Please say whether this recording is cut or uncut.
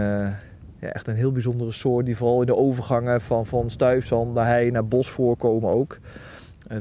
uncut